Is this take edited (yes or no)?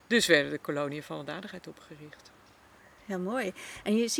no